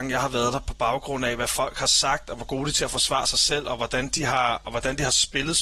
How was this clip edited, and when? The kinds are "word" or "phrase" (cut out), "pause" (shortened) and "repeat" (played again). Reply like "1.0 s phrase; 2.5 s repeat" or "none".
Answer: none